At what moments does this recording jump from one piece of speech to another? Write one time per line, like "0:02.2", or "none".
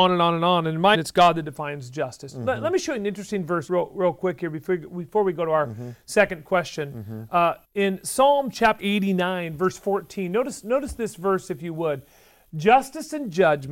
0:00.9
0:03.7
0:07.6
0:08.8